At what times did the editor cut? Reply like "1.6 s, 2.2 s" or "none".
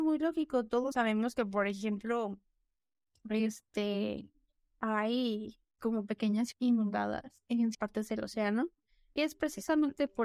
0.9 s, 5.8 s, 6.5 s, 7.7 s